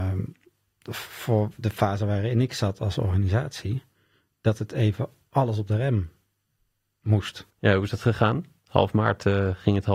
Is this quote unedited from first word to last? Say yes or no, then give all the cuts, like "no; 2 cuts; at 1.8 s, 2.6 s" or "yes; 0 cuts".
no; 1 cut; at 7.5 s